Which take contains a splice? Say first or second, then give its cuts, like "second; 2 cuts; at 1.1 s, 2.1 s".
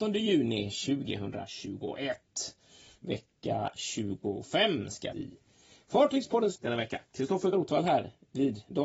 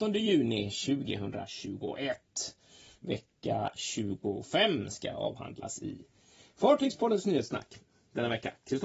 first; 3 cuts; at 5.1 s, 6.6 s, 7.5 s